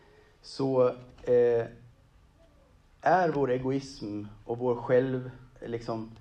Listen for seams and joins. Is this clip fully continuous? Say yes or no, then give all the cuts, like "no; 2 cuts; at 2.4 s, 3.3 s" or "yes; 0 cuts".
yes; 0 cuts